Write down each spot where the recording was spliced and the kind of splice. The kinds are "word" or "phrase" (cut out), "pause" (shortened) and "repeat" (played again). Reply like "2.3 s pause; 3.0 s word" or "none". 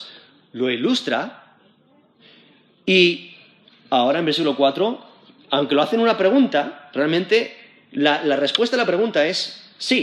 none